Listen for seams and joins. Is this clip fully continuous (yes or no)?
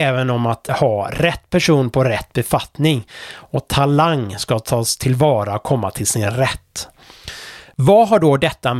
yes